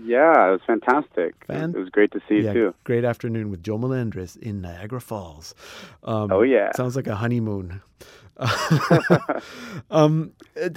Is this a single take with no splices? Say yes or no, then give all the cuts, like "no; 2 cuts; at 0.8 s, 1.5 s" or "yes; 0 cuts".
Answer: yes; 0 cuts